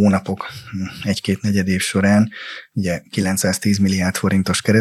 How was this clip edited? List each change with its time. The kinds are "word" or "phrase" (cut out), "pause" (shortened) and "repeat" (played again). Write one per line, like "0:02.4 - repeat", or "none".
none

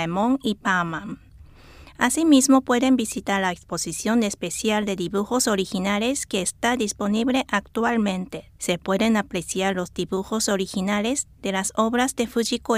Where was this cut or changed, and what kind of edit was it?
0:08.6 - pause

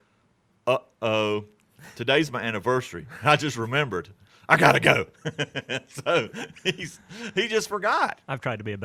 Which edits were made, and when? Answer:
none

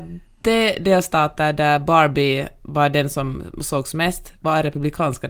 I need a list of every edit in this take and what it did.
none

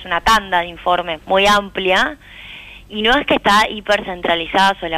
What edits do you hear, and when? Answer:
0:01.2 - word

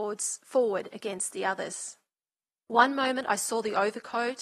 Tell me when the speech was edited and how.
none

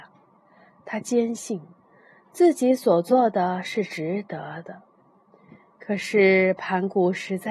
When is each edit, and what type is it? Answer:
none

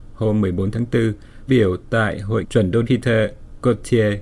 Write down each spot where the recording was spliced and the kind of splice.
0:01.5 - word
0:02.4 - word
0:02.8 - word

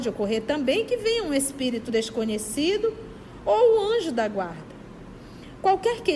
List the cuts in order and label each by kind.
none

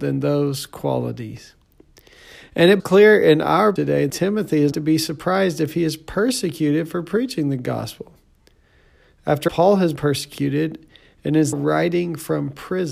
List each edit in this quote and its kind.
0:02.8 - word
0:03.8 - word
0:04.1 - word
0:04.7 - word
0:09.5 - word
0:10.0 - word
0:11.5 - word

